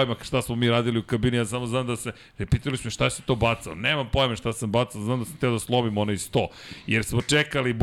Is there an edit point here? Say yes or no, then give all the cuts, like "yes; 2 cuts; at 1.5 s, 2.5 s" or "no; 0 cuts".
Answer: no; 0 cuts